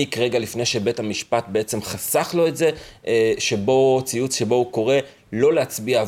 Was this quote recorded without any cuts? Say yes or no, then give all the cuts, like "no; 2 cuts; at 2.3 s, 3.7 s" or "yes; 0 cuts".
yes; 0 cuts